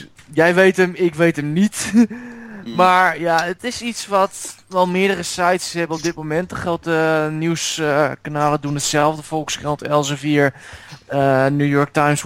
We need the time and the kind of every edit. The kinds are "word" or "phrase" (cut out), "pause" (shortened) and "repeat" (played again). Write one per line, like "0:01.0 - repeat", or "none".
none